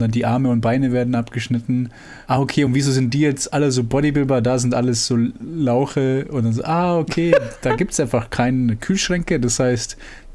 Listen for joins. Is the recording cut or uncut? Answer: uncut